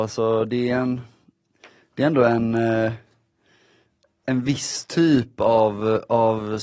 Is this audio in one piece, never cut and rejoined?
yes; 0 cuts

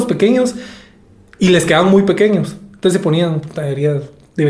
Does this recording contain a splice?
no; 0 cuts

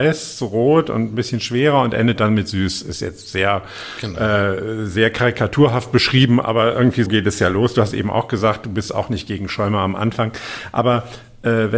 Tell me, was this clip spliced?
yes; 1 cut; at 7.1 s

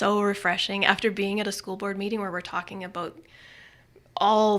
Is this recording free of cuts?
yes; 0 cuts

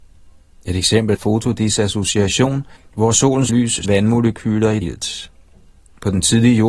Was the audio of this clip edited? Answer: yes; 5 cuts; at 1.1 s, 2.8 s, 3.5 s, 3.8 s, 4.8 s

